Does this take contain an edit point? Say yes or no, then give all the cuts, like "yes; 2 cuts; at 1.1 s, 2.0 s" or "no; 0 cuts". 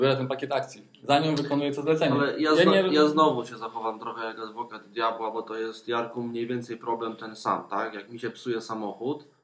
no; 0 cuts